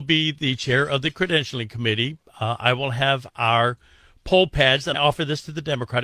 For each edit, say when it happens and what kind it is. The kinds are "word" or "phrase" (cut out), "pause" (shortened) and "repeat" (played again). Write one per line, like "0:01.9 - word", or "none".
0:04.9 - word